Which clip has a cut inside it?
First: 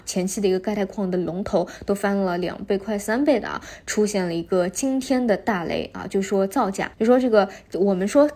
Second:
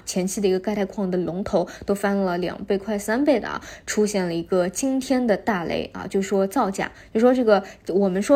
first; 1 cut; at 6.9 s

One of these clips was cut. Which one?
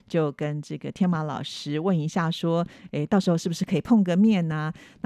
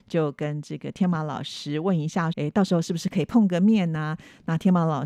second; 1 cut; at 2.3 s

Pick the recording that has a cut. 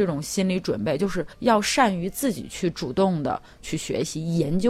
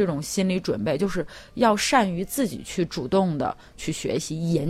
first; 1 cut; at 1.3 s

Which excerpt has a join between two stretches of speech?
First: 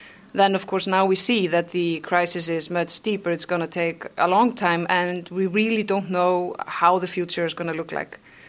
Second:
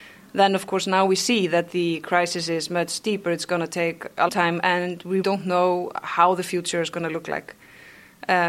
second; 2 cuts; at 4.3 s, 5.2 s

